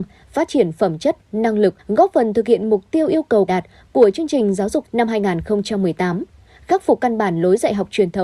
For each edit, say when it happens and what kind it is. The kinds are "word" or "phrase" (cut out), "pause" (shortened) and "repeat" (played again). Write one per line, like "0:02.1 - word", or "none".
0:01.8 - pause
0:03.5 - word
0:04.8 - phrase